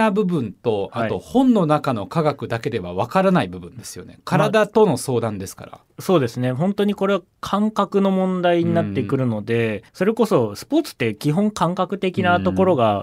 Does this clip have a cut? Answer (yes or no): yes